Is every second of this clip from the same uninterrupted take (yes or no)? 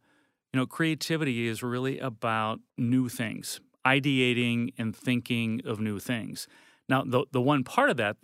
no